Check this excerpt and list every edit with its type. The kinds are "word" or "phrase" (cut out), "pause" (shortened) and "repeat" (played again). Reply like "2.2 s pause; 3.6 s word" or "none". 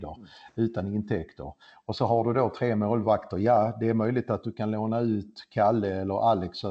none